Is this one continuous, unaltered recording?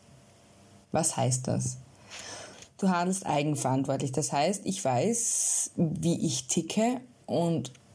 yes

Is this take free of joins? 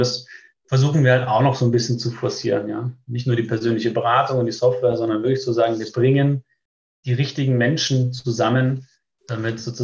yes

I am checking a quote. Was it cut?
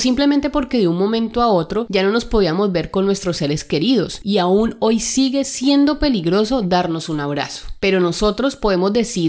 no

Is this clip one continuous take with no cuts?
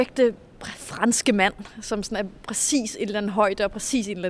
yes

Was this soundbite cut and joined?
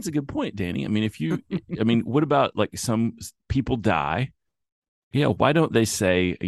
no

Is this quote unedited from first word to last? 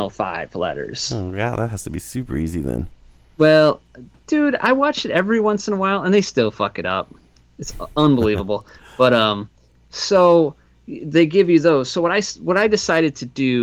yes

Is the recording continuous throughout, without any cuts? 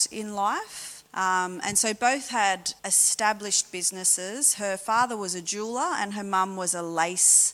no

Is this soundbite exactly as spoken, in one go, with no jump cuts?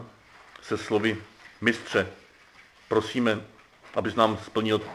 yes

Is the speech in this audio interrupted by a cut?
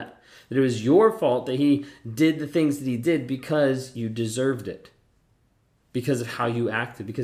no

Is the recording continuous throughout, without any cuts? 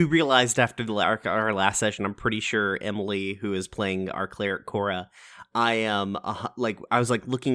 yes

